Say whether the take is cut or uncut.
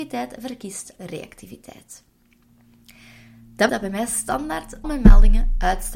cut